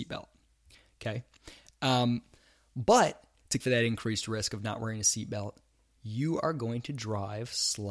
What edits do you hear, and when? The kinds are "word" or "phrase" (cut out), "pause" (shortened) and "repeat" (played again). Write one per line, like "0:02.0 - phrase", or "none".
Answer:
0:03.6 - word